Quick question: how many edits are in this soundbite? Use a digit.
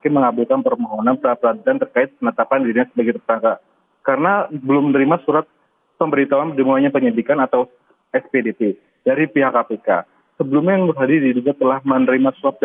0